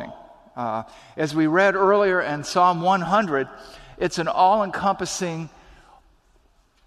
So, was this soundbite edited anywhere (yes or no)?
no